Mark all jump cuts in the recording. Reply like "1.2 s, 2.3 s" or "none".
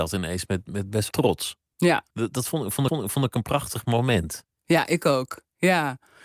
1.1 s, 2.1 s, 2.9 s